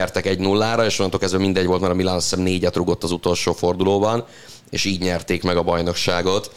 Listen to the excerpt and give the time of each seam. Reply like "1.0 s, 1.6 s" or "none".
none